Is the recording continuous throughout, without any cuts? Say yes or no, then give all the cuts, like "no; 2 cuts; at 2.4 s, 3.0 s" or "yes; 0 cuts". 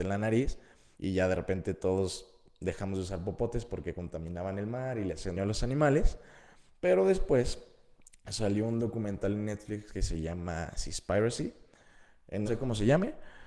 no; 4 cuts; at 0.9 s, 5.4 s, 6.7 s, 12.5 s